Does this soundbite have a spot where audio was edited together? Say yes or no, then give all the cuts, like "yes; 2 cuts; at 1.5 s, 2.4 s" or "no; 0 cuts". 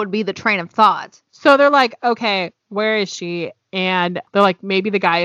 yes; 1 cut; at 1.3 s